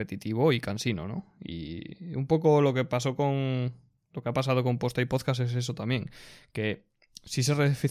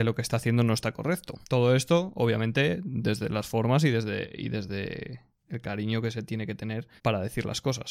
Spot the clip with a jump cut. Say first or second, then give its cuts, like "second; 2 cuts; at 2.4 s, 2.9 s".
second; 3 cuts; at 1.4 s, 5.3 s, 7.0 s